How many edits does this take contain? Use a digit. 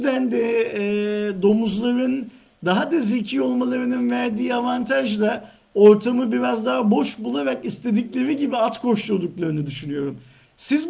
0